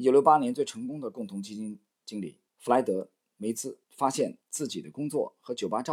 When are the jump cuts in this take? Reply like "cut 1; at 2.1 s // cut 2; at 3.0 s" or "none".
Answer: cut 1; at 2.5 s // cut 2; at 3.8 s // cut 3; at 4.4 s